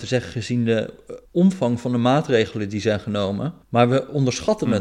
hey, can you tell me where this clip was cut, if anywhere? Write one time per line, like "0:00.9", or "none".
0:01.3
0:03.6